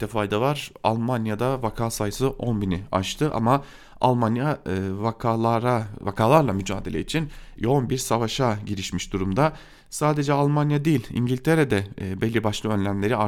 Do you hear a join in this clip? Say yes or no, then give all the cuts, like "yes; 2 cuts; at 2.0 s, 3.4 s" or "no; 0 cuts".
no; 0 cuts